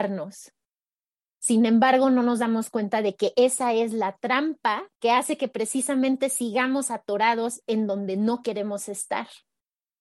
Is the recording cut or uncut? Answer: cut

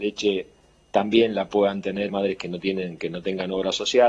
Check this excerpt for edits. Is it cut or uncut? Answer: cut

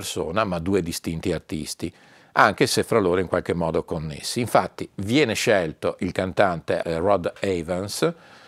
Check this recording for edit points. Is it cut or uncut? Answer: uncut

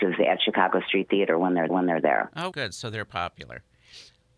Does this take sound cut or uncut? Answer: cut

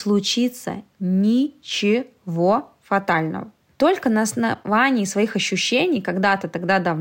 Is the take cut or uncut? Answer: uncut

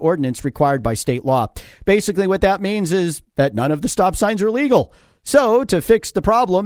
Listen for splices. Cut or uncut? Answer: uncut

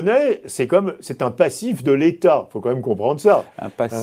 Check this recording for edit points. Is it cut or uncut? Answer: uncut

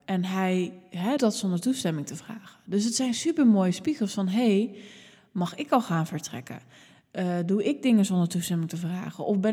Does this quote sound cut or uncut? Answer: cut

